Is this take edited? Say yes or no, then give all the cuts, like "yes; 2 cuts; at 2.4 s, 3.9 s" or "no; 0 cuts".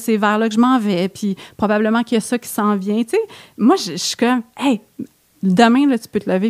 no; 0 cuts